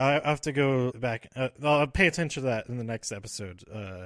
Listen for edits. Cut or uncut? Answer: cut